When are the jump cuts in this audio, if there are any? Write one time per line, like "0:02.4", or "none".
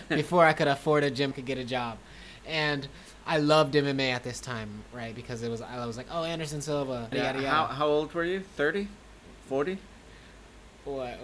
0:01.3
0:07.1